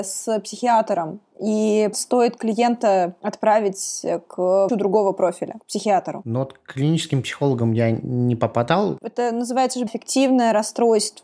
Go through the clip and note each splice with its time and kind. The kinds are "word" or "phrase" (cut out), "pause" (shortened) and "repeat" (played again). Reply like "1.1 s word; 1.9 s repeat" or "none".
1.9 s phrase; 4.7 s word; 9.9 s word